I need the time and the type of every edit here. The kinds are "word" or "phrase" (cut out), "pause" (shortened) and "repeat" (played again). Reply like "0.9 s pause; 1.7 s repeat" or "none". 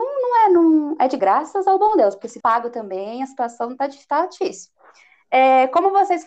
1.2 s word; 2.4 s word